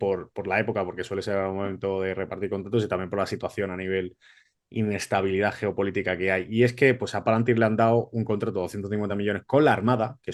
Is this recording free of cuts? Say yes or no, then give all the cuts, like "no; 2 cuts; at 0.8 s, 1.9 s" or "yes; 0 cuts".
yes; 0 cuts